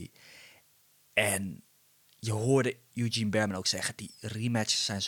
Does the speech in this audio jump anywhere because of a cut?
no; 0 cuts

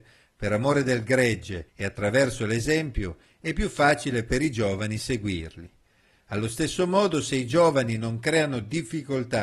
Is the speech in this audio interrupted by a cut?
yes; 1 cut; at 1.7 s

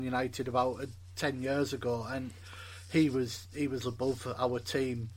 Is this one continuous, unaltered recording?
no; 1 cut; at 3.8 s

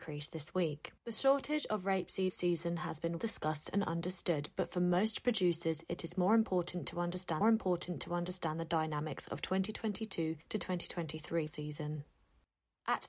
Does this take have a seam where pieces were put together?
yes; 6 cuts; at 1.0 s, 2.3 s, 3.2 s, 7.4 s, 10.4 s, 11.5 s

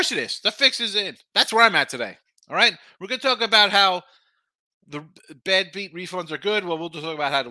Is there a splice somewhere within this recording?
no; 0 cuts

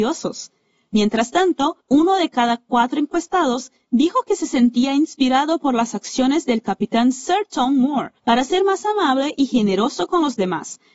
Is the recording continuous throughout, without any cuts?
no; 2 cuts; at 1.8 s, 8.2 s

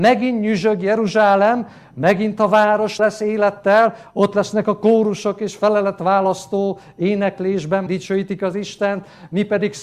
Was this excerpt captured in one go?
no; 2 cuts; at 3.0 s, 7.9 s

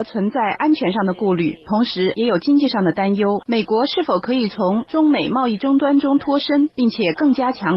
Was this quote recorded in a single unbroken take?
yes; 0 cuts

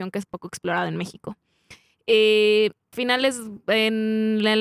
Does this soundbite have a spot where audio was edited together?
yes; 1 cut; at 2.9 s

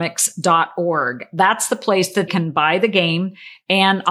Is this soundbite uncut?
no; 1 cut; at 2.3 s

